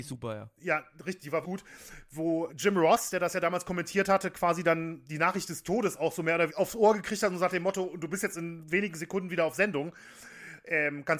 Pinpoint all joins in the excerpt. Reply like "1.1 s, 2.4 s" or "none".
1.4 s, 2.5 s, 6.5 s

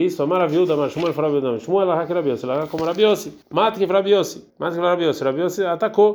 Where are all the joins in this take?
3.4 s, 4.5 s

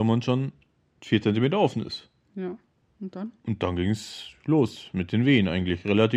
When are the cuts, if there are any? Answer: none

